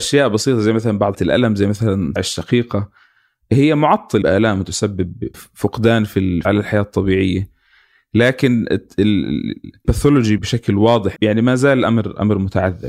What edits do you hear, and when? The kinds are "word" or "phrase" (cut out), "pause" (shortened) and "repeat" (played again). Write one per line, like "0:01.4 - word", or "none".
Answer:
0:01.1 - word
0:02.2 - word
0:04.2 - word
0:05.3 - word
0:06.4 - word
0:09.8 - word
0:10.4 - word
0:11.2 - word